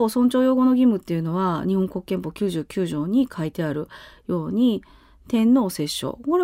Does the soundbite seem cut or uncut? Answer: uncut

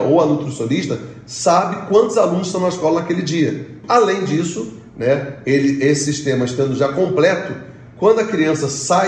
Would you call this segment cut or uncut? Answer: uncut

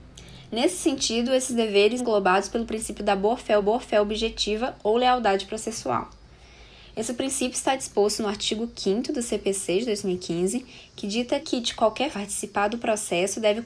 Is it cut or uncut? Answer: cut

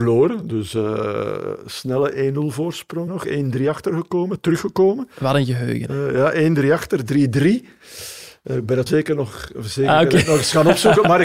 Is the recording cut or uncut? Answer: cut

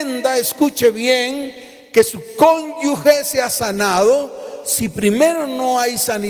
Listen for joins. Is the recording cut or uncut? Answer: uncut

